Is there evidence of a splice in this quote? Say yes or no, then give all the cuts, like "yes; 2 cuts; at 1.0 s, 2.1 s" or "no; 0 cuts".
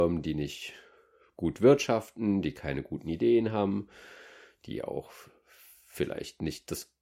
no; 0 cuts